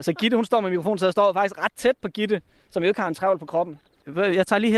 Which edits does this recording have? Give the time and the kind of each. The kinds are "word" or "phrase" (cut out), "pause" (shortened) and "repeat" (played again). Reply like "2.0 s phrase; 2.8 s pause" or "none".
none